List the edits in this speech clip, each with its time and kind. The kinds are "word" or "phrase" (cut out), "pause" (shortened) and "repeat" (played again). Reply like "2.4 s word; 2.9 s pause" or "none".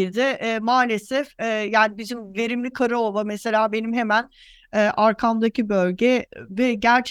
none